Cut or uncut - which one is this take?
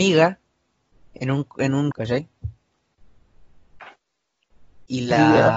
cut